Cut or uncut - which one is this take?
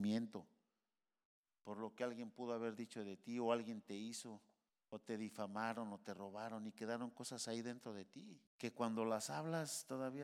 cut